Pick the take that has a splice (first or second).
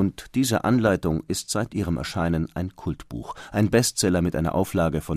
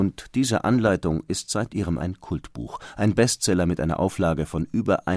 second